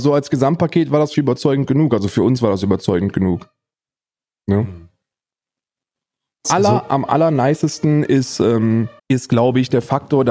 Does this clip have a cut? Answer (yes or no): yes